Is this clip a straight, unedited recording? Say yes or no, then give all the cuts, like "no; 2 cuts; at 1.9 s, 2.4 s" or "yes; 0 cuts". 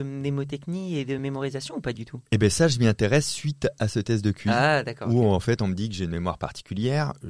yes; 0 cuts